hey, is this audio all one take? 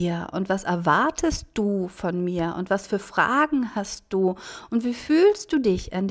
yes; 0 cuts

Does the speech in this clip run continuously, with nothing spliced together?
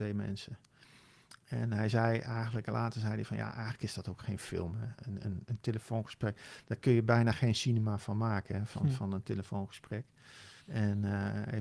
no; 1 cut; at 10.6 s

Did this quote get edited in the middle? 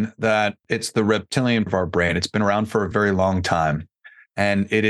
yes; 2 cuts; at 1.7 s, 2.9 s

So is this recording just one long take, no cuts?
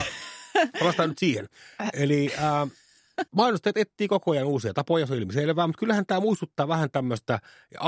no; 1 cut; at 3.3 s

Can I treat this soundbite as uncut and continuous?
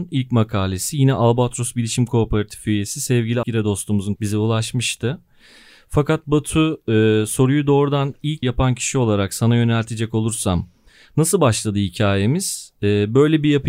no; 3 cuts; at 3.4 s, 4.2 s, 8.4 s

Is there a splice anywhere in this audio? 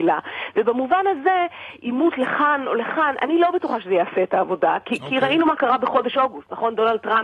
no; 0 cuts

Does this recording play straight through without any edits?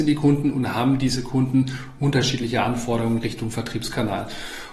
yes; 0 cuts

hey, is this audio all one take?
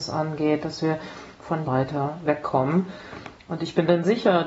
no; 1 cut; at 1.6 s

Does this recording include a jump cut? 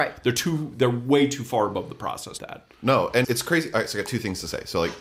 yes; 2 cuts; at 2.4 s, 3.2 s

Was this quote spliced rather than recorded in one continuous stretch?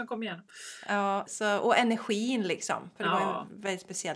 yes; 1 cut; at 1.3 s

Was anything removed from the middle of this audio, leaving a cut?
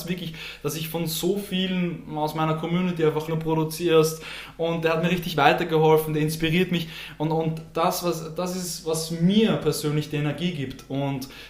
yes; 1 cut; at 3.3 s

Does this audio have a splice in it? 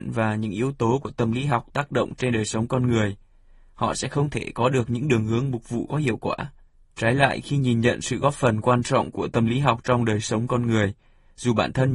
no; 0 cuts

